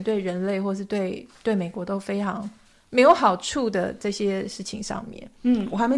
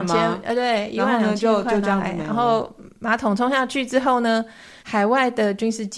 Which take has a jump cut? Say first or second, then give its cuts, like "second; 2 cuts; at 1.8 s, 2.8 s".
second; 1 cut; at 4.8 s